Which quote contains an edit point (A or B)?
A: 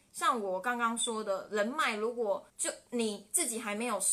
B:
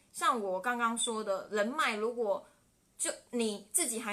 A